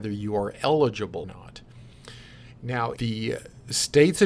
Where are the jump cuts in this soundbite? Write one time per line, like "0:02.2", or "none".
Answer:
0:01.2
0:03.0